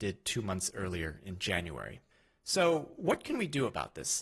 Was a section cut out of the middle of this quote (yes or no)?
no